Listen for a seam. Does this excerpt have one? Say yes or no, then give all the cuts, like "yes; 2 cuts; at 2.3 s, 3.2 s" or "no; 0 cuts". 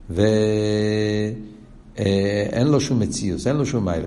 no; 0 cuts